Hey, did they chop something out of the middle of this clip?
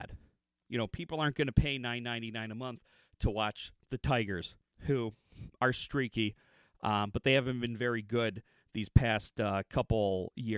no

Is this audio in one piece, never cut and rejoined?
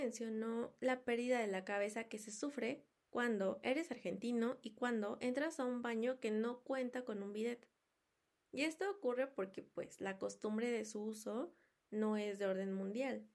yes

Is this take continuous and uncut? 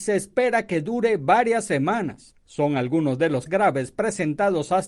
no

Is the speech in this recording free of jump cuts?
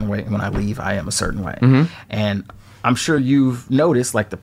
yes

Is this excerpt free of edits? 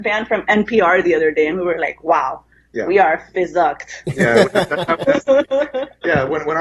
yes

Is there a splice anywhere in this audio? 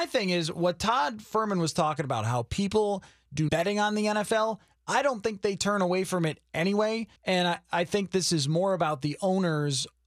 yes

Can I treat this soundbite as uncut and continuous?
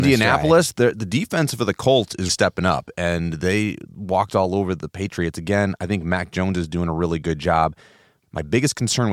no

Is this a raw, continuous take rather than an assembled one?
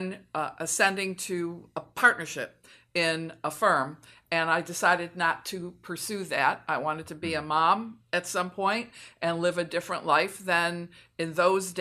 yes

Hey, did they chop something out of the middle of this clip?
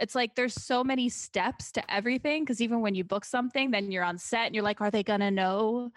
no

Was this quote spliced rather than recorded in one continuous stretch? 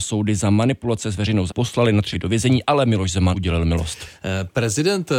yes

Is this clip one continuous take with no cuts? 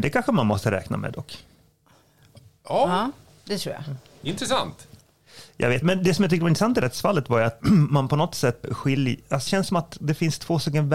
no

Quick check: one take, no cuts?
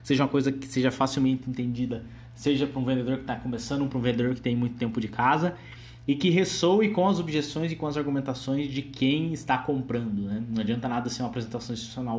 yes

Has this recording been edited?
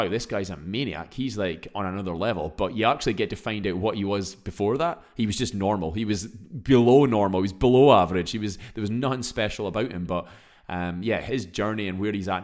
no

